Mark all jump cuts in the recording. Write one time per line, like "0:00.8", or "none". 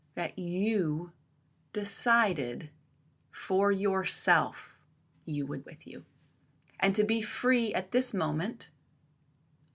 0:05.1
0:05.6
0:06.6